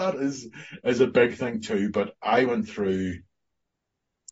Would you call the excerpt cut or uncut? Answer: uncut